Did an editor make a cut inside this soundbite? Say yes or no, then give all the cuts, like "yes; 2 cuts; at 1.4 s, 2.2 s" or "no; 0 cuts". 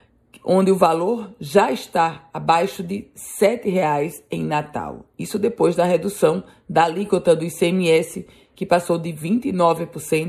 no; 0 cuts